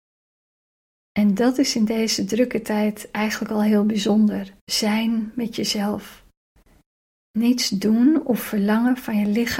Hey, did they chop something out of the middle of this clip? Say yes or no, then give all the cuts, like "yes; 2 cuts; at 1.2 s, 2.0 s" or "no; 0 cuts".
yes; 1 cut; at 4.6 s